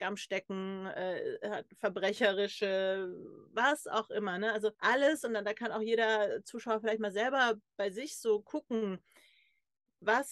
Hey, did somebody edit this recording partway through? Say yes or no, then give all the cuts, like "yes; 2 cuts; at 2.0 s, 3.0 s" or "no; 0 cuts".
yes; 1 cut; at 4.7 s